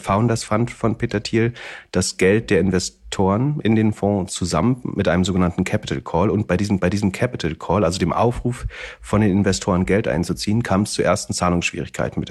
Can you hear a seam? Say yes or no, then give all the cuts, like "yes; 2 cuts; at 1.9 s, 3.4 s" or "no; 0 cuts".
yes; 1 cut; at 6.8 s